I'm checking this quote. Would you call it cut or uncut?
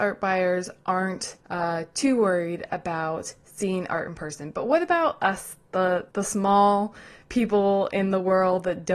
cut